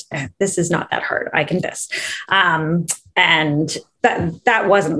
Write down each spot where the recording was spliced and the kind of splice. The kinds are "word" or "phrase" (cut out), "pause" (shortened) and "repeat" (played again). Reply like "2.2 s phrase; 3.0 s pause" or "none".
1.6 s word; 4.0 s word